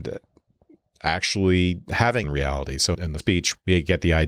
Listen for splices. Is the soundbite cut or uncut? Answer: cut